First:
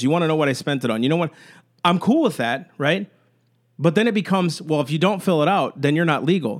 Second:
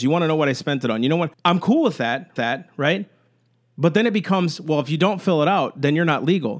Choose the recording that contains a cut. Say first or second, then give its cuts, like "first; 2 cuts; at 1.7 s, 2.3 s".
second; 2 cuts; at 1.3 s, 2.4 s